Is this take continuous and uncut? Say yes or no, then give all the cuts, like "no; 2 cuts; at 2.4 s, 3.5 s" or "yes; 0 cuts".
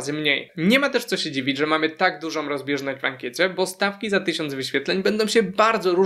yes; 0 cuts